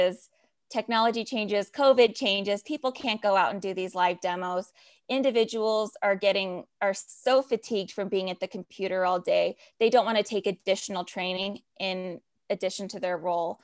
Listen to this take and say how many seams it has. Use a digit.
0